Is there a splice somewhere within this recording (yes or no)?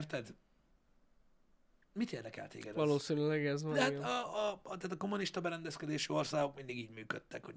no